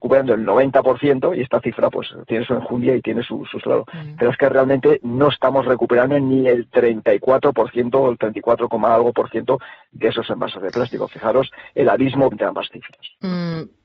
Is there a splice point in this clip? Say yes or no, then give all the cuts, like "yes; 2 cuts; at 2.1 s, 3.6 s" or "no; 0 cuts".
yes; 3 cuts; at 2.3 s, 3.6 s, 12.3 s